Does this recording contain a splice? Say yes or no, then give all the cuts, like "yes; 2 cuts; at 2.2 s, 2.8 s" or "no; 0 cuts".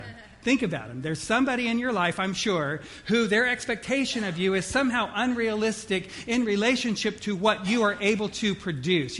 no; 0 cuts